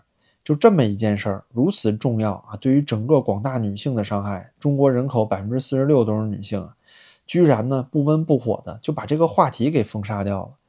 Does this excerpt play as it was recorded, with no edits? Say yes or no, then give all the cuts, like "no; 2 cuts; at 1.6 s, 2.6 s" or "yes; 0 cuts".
yes; 0 cuts